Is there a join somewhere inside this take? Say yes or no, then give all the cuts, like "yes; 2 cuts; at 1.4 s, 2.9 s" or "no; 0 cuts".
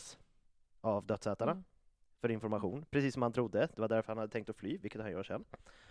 no; 0 cuts